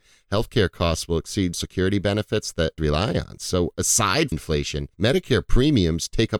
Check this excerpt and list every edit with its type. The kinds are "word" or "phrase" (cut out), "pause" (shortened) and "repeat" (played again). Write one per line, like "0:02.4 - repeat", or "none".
0:01.5 - word
0:02.8 - word
0:04.3 - word
0:04.9 - pause